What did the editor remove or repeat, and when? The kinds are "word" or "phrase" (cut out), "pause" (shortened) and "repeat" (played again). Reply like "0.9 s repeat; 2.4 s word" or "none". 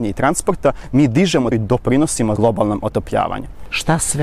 1.5 s word; 2.4 s word